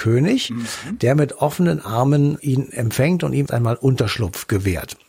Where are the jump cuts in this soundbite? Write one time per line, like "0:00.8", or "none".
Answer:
0:02.4
0:03.5